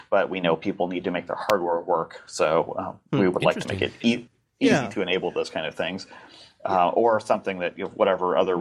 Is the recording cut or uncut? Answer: uncut